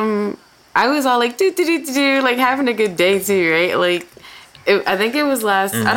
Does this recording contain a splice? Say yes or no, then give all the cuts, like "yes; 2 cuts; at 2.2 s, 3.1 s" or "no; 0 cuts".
no; 0 cuts